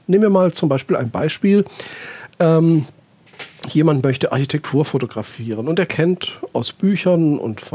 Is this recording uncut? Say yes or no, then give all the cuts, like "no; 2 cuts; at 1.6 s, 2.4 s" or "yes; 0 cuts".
yes; 0 cuts